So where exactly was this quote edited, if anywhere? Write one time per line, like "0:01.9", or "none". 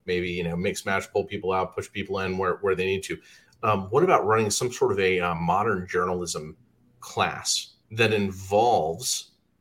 0:07.8